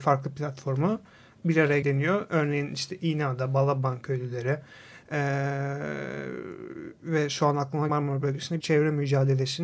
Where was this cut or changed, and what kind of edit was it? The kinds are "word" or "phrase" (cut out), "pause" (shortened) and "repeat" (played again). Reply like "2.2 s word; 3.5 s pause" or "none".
1.8 s word; 7.9 s word; 8.6 s word